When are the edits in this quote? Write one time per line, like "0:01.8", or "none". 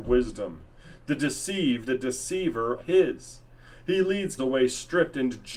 0:01.9
0:02.8
0:04.4